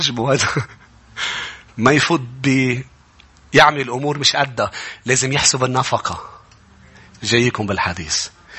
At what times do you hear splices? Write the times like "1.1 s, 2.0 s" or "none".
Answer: none